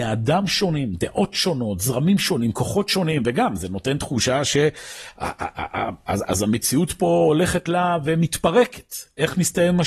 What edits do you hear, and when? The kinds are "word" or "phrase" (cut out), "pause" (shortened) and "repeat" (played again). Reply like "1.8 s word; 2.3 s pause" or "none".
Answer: none